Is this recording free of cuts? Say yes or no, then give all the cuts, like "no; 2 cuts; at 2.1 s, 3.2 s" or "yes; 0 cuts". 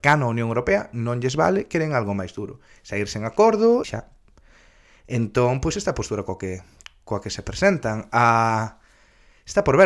no; 1 cut; at 3.8 s